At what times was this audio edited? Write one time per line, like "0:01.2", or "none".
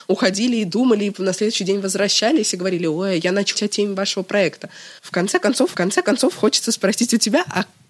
0:03.5
0:05.0
0:05.7